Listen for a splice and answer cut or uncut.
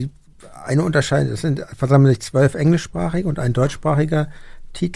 uncut